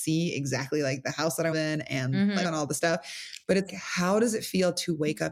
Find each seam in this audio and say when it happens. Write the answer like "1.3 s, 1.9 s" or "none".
1.5 s, 2.4 s, 3.7 s